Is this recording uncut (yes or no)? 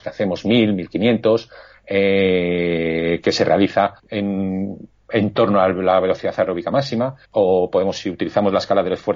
no